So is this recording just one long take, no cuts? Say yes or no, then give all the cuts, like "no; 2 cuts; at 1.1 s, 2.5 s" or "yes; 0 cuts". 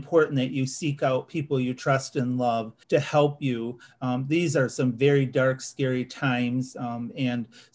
no; 1 cut; at 2.8 s